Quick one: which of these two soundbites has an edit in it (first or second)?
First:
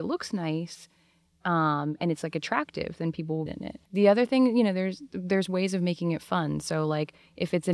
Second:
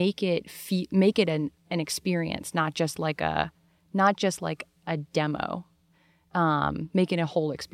first